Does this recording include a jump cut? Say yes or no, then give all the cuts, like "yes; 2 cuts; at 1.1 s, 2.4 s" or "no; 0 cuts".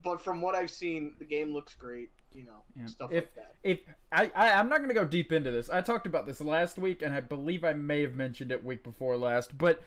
no; 0 cuts